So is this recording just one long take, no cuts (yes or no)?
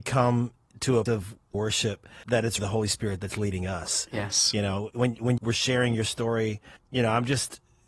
no